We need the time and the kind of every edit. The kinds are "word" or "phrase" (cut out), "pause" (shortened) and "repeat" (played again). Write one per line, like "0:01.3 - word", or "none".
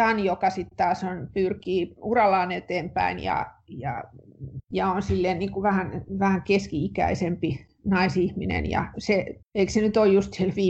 0:04.6 - pause
0:09.4 - pause